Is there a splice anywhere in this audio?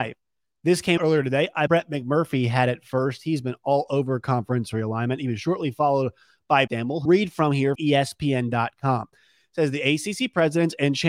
yes; 5 cuts; at 1.0 s, 1.7 s, 6.7 s, 7.1 s, 7.8 s

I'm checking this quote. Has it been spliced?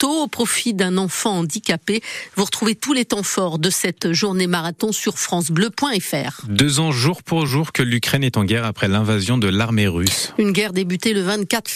no; 0 cuts

